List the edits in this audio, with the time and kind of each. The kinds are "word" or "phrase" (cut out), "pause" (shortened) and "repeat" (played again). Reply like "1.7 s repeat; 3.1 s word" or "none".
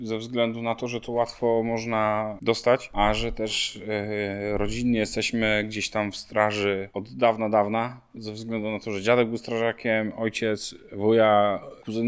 none